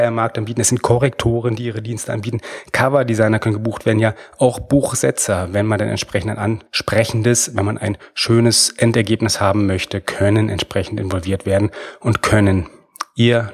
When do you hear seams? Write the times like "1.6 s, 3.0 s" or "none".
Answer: 6.7 s